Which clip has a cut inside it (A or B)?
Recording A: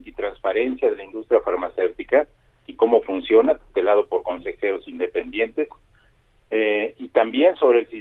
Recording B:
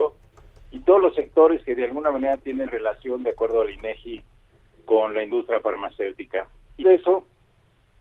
B